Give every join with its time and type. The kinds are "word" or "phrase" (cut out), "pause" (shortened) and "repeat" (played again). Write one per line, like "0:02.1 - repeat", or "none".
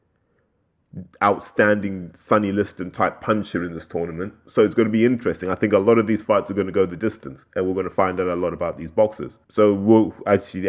0:09.4 - pause